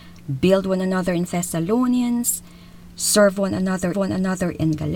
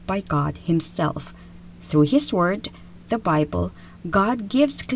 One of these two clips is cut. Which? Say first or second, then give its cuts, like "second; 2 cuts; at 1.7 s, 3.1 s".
first; 2 cuts; at 1.3 s, 3.9 s